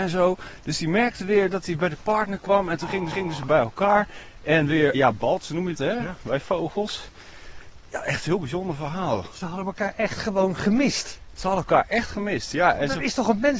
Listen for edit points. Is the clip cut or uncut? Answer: cut